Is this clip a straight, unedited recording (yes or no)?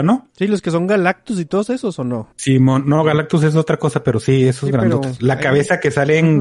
no